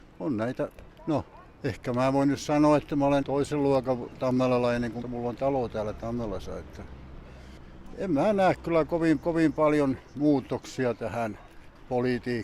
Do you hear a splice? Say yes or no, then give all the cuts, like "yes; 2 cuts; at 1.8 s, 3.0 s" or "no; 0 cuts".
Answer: yes; 3 cuts; at 3.2 s, 5.0 s, 9.2 s